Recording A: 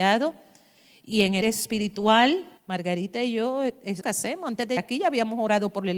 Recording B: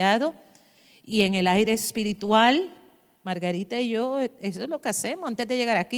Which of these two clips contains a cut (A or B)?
A